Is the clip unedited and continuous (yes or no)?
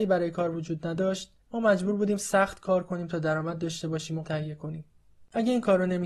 no